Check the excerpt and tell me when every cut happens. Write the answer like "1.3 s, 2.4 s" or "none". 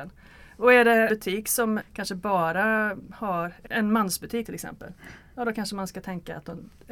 1.1 s, 1.8 s, 3.7 s, 4.4 s